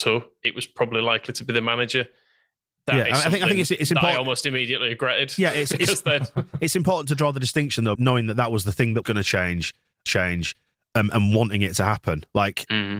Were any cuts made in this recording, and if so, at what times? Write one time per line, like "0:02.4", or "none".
0:08.0
0:09.0
0:10.1